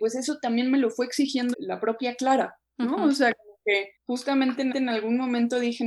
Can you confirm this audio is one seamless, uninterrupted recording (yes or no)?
no